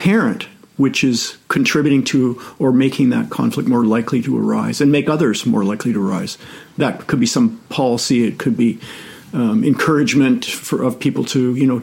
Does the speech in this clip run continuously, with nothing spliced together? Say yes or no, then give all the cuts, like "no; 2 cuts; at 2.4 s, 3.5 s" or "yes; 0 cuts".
no; 1 cut; at 1.4 s